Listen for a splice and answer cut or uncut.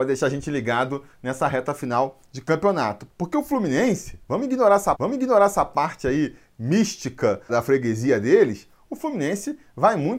cut